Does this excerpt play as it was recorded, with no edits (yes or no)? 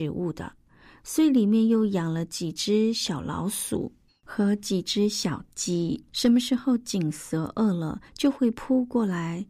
no